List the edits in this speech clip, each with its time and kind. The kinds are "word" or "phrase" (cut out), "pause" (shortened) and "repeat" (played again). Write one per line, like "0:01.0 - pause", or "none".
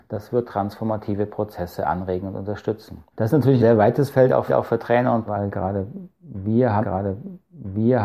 0:03.1 - pause
0:03.6 - word
0:04.5 - repeat
0:05.3 - word
0:06.8 - repeat

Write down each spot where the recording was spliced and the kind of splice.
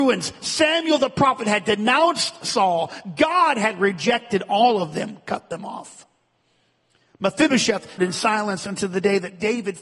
0:08.0 - word

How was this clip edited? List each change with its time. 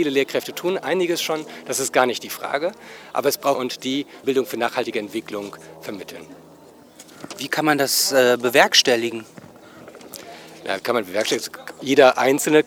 0:03.5 - phrase
0:04.2 - word
0:10.8 - word

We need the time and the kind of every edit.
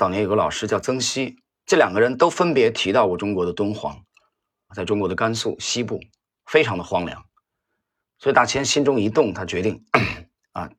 0:04.7 - word

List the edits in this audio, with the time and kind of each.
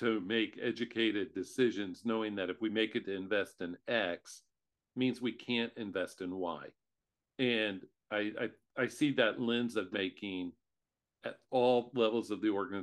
0:03.0 - word
0:09.9 - word

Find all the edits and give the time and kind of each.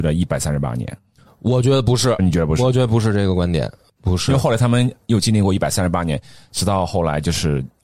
0:02.2 - phrase

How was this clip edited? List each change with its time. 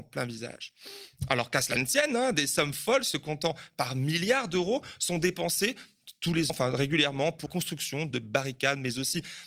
0:06.5 - word
0:07.5 - word
0:08.1 - word

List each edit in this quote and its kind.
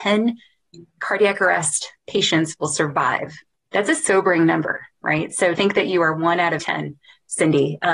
0:02.0 - pause
0:03.6 - pause
0:05.6 - word
0:06.6 - word

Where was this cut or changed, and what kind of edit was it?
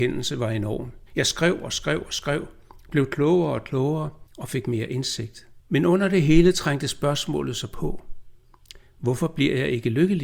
0:01.1 - pause
0:04.3 - pause
0:05.6 - pause

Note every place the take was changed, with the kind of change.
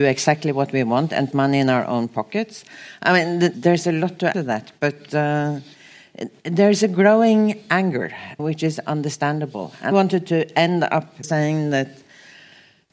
0:01.3 - word
0:03.5 - word
0:04.3 - word
0:08.4 - word
0:09.9 - word
0:11.2 - word

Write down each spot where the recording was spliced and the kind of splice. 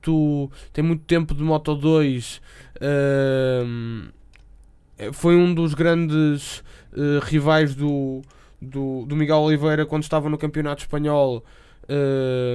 none

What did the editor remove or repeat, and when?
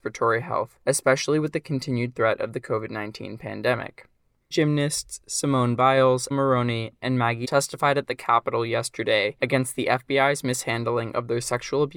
0:04.5 - word
0:06.3 - phrase
0:07.4 - word

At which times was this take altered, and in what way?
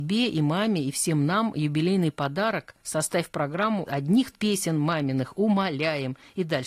0:03.9 - word
0:04.3 - word

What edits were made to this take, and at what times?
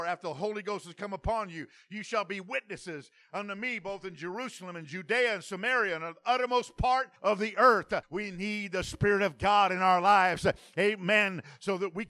0:07.2 - pause
0:08.0 - pause

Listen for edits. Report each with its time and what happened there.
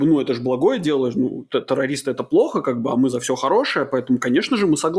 none

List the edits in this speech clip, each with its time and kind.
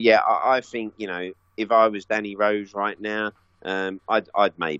none

